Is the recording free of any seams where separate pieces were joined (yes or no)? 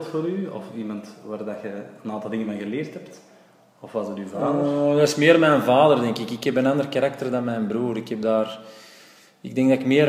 yes